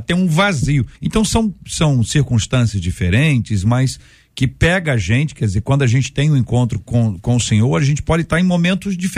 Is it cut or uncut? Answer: cut